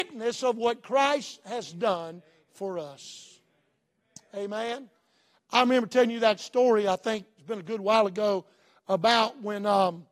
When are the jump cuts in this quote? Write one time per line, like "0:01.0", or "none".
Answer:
none